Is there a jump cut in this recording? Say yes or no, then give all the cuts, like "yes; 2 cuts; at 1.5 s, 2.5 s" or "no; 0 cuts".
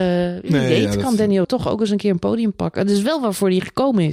yes; 1 cut; at 1.4 s